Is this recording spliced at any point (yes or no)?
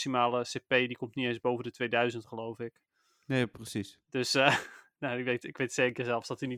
no